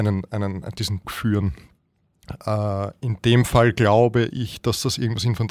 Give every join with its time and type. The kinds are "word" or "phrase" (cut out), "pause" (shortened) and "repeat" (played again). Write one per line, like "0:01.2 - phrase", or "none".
0:01.0 - word